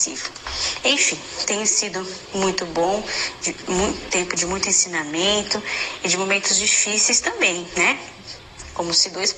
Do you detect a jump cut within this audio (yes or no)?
no